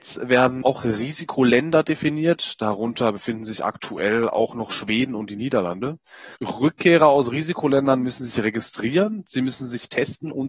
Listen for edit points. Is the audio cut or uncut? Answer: cut